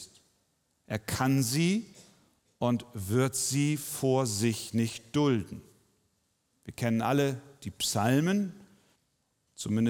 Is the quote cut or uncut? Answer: uncut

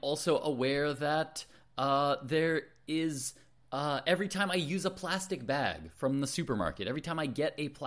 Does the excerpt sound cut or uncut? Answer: uncut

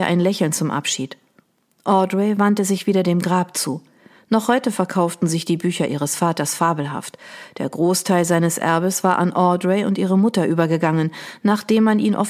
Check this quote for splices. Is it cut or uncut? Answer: uncut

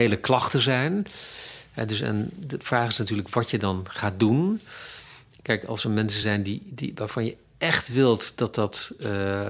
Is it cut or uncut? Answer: uncut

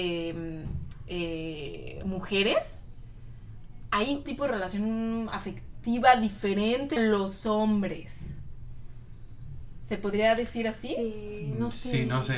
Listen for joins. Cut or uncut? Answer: cut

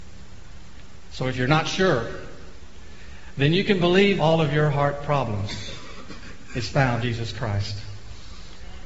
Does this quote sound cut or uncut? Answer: cut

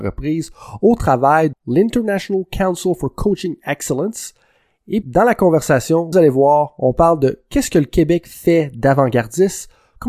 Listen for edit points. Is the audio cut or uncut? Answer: cut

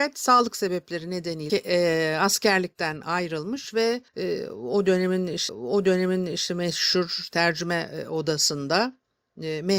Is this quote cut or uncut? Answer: cut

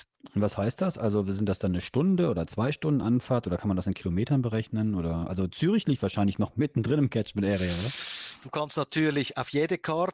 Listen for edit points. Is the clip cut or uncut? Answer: uncut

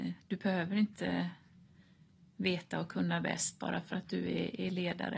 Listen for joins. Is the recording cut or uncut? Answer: uncut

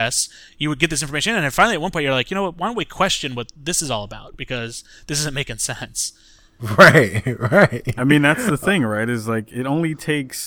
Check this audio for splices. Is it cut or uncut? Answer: uncut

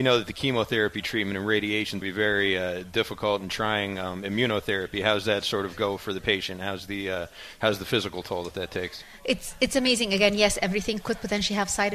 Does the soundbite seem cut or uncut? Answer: cut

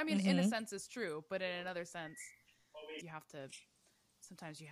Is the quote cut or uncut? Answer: cut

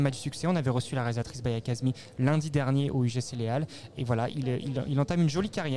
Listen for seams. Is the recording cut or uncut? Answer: cut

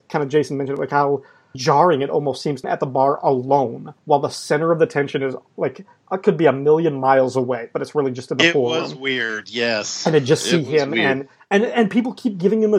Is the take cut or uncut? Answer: cut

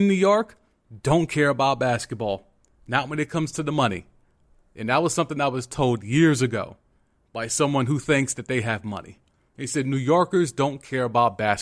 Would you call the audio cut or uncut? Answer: uncut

